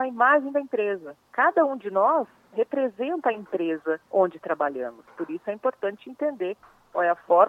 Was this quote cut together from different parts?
yes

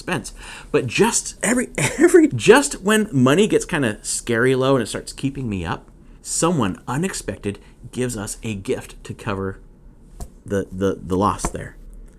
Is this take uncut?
no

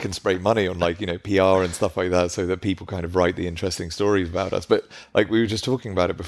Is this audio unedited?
yes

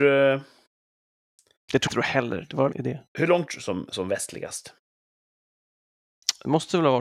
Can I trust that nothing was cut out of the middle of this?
no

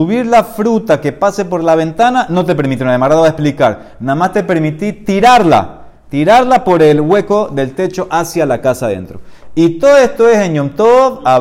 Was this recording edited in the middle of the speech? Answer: no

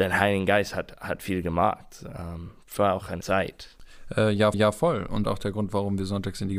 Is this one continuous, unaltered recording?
no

